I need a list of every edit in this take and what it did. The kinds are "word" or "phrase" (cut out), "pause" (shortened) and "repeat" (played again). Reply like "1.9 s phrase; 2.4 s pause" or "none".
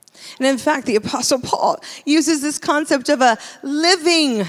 none